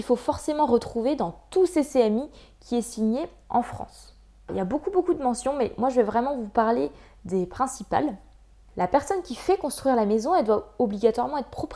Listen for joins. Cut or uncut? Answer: uncut